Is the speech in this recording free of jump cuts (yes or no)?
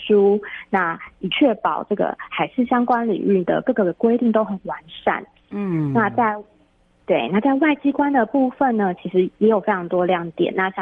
yes